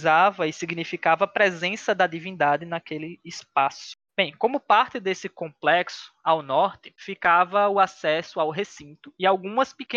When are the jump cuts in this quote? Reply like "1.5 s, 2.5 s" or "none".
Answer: none